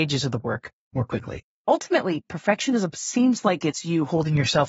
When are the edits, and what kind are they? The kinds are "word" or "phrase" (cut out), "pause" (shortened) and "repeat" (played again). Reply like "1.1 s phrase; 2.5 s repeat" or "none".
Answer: none